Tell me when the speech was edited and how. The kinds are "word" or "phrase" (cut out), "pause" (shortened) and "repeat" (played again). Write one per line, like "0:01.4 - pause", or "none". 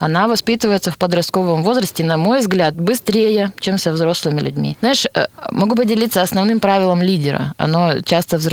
none